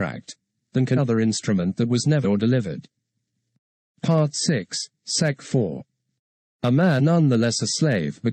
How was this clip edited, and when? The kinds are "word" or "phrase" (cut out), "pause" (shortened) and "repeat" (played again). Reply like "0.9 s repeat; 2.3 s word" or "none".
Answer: 1.0 s word; 2.2 s word; 7.0 s word